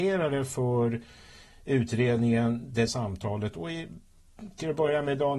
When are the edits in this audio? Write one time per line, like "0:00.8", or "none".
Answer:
0:02.9